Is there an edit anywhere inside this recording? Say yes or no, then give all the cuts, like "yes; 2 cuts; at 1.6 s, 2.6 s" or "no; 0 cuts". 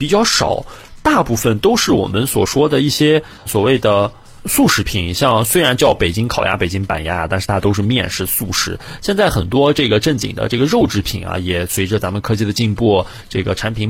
yes; 1 cut; at 3.5 s